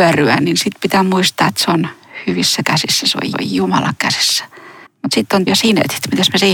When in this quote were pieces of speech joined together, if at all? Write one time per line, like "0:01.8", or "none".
0:03.3
0:04.9
0:05.5

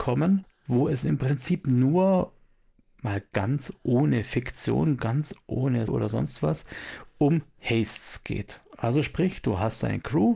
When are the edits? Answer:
0:05.9

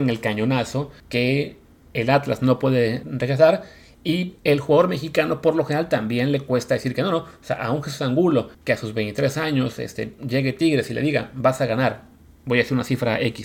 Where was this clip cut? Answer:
0:01.0
0:03.0
0:04.4
0:08.5

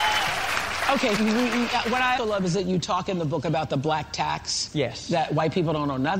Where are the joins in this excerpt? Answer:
0:01.2
0:02.2

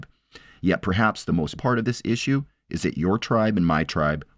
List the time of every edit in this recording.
0:01.6

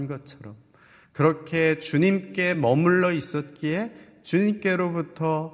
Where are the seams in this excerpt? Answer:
none

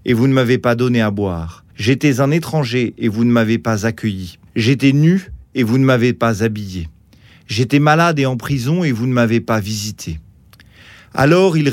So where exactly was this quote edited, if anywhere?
0:01.7
0:04.5

